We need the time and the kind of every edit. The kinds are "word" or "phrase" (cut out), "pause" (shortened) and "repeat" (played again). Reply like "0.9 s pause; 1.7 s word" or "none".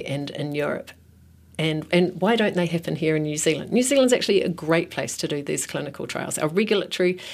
none